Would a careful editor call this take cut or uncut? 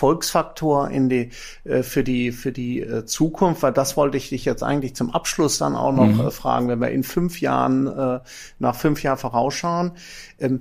uncut